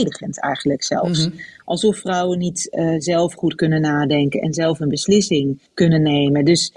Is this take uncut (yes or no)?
no